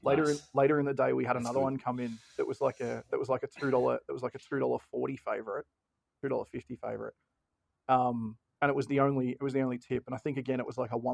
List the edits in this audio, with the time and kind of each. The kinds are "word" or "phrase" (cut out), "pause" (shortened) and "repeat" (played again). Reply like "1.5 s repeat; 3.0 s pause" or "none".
none